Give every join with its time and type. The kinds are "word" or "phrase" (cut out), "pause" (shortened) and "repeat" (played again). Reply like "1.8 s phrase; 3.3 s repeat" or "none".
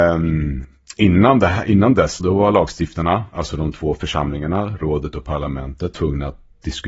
2.2 s word; 5.9 s phrase